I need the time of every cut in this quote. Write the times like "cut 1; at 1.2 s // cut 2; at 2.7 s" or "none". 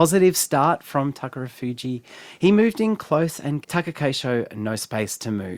cut 1; at 3.6 s